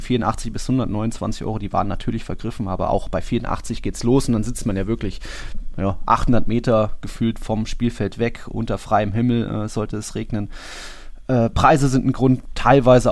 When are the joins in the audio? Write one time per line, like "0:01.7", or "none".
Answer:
none